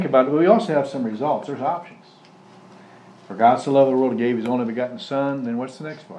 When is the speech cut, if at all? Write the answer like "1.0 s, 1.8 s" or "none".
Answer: none